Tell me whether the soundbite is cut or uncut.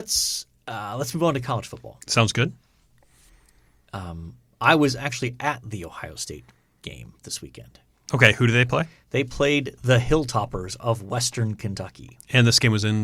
uncut